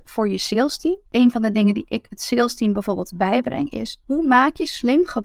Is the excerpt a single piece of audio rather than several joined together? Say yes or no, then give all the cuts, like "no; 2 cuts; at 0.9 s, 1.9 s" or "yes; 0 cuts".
no; 2 cuts; at 1.1 s, 4.0 s